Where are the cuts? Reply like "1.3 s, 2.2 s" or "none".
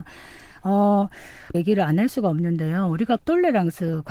1.5 s, 3.2 s